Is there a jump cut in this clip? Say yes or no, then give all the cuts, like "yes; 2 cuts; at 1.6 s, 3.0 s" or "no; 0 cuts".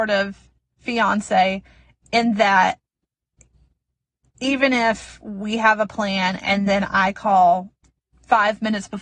no; 0 cuts